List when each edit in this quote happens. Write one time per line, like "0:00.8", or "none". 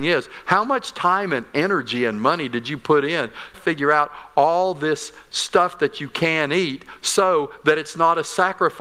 0:03.5